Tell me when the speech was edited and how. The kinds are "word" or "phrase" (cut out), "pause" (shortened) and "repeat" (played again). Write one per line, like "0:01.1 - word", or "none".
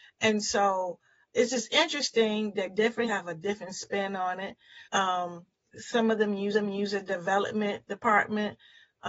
0:01.3 - word
0:03.0 - word
0:04.8 - pause
0:06.5 - repeat